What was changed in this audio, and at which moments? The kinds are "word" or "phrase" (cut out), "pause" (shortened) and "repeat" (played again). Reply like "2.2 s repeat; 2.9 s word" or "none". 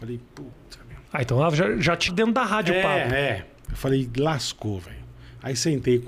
1.1 s pause; 2.1 s word